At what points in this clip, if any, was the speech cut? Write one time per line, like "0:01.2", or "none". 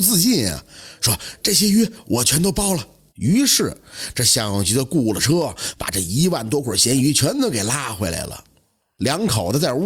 0:03.1

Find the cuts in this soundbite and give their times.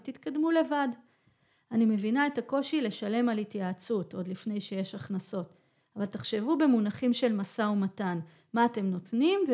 none

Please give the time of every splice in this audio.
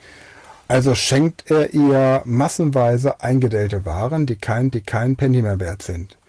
0:04.7

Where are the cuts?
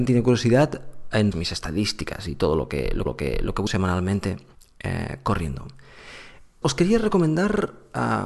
0:01.3
0:03.1
0:03.7
0:04.5
0:06.6

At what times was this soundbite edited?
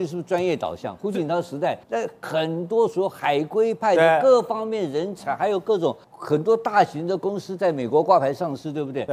0:01.8
0:06.0

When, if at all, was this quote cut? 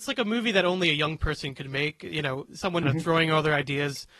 0:02.8

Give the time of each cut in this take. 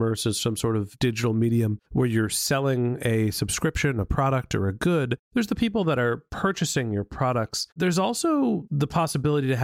0:01.8
0:07.7

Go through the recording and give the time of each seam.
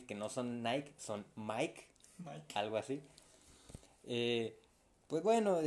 none

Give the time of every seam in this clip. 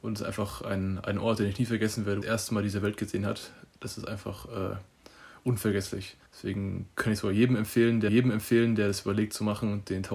0:02.2
0:06.3
0:08.1

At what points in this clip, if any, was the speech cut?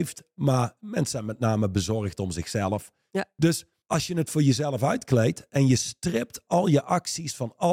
0:03.8

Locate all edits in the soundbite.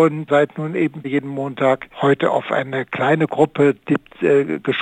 0:01.0
0:01.9

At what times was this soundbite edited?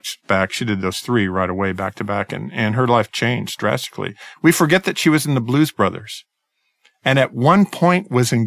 none

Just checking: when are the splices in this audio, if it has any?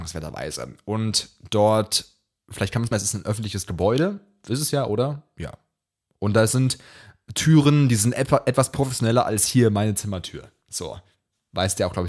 0:02.9

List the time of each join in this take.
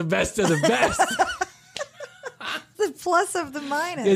0:02.7

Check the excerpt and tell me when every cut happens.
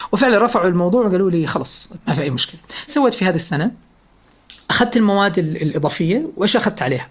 0:02.0
0:02.9

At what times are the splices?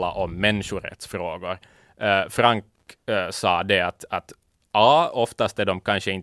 none

